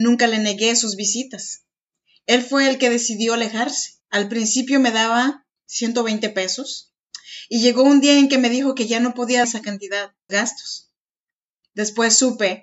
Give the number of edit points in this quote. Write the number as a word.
four